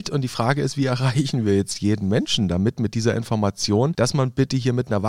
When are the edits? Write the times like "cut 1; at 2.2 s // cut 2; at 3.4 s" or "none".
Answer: none

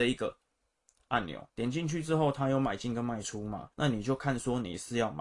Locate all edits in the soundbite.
cut 1; at 1.5 s // cut 2; at 3.7 s

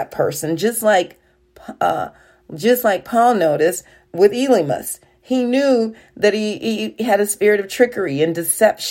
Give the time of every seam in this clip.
none

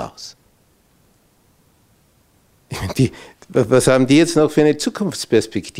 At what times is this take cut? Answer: none

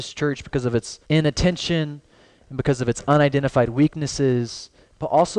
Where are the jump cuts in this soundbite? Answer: cut 1; at 1.0 s

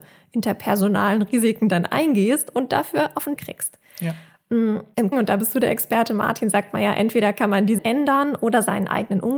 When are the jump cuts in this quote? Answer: cut 1; at 3.4 s // cut 2; at 5.1 s // cut 3; at 7.8 s

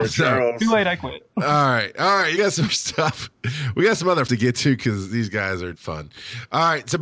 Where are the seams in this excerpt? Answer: cut 1; at 1.3 s // cut 2; at 2.4 s // cut 3; at 2.7 s // cut 4; at 4.3 s // cut 5; at 5.7 s

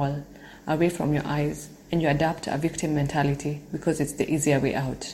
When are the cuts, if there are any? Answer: cut 1; at 1.8 s

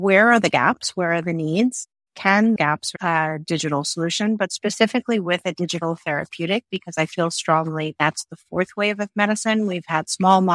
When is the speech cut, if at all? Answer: cut 1; at 2.6 s // cut 2; at 3.0 s

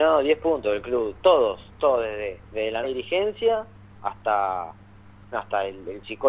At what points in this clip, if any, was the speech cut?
cut 1; at 2.4 s // cut 2; at 2.8 s // cut 3; at 5.3 s

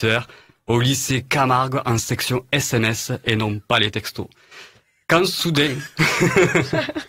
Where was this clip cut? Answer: none

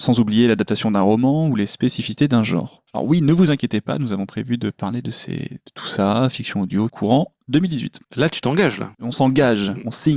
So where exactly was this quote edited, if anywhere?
cut 1; at 2.9 s // cut 2; at 6.9 s // cut 3; at 8.0 s // cut 4; at 8.9 s

